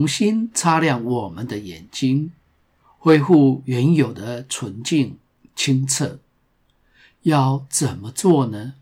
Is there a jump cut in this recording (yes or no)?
no